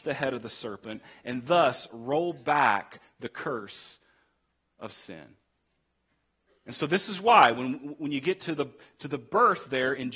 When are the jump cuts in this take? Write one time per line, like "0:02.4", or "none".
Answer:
none

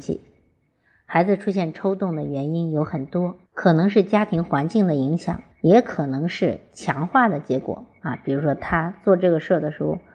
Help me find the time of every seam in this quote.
0:03.5
0:05.5

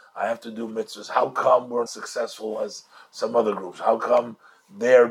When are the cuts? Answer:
0:01.9

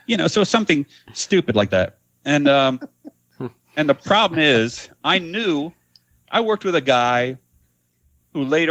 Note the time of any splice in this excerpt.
none

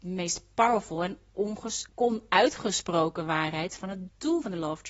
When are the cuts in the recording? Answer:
0:01.9

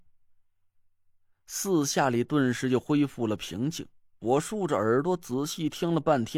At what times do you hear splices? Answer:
none

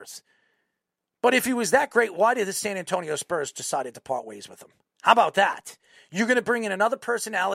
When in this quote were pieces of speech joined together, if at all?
0:04.8

